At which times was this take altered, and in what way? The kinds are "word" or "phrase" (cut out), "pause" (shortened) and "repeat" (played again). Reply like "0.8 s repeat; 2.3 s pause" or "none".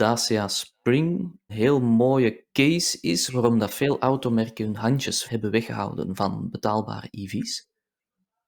1.5 s word; 5.3 s word